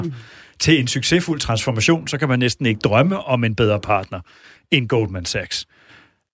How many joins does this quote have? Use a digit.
0